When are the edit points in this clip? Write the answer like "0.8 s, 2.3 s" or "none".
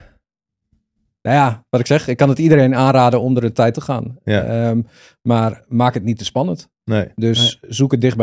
3.7 s